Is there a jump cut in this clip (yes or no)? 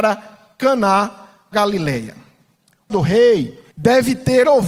yes